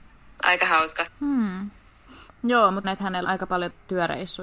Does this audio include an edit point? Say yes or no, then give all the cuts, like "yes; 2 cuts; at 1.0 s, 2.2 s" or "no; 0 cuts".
yes; 3 cuts; at 1.1 s, 2.8 s, 3.2 s